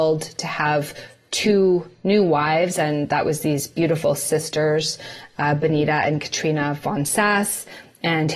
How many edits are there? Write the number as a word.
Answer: zero